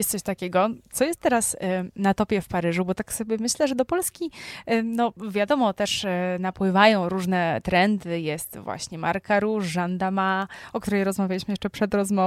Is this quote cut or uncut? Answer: uncut